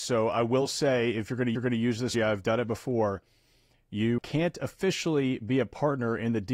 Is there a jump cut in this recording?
yes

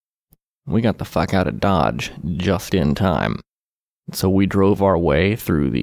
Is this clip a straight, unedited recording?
no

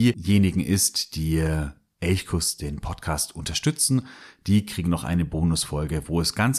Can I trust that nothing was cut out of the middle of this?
yes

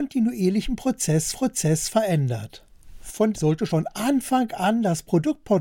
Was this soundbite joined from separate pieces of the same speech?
yes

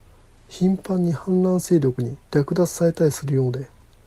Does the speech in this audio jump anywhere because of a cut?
yes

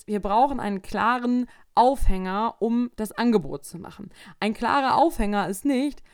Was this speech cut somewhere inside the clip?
no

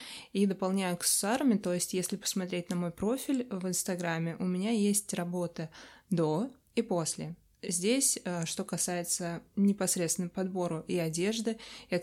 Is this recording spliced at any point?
no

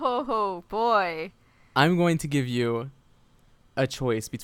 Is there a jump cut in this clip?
no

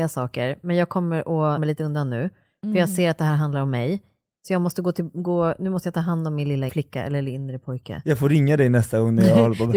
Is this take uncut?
no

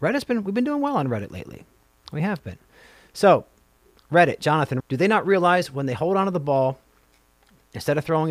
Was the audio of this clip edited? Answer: yes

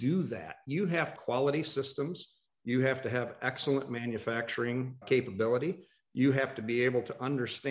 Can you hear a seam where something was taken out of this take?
yes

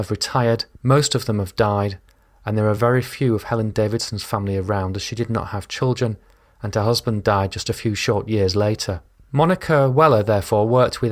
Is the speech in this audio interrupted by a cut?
no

